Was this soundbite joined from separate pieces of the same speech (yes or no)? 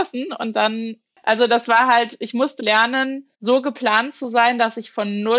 yes